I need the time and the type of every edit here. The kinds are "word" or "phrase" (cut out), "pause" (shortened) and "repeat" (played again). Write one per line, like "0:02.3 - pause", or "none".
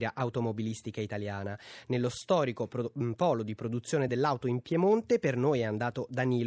none